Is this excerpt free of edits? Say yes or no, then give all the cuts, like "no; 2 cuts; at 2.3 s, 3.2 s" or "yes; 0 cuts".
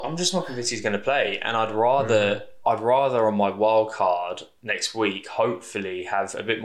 yes; 0 cuts